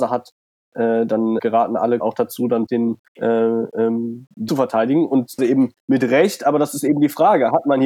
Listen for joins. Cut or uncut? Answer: cut